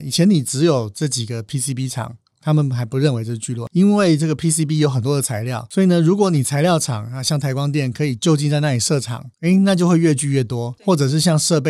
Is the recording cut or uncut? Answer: uncut